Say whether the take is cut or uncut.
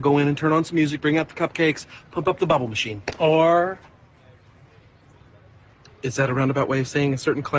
uncut